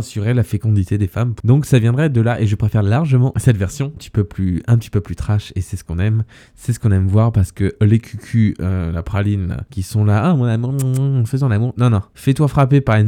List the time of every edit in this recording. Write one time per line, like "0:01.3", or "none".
0:04.0